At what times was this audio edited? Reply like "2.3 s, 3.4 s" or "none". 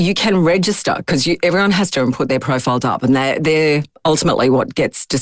1.9 s, 2.8 s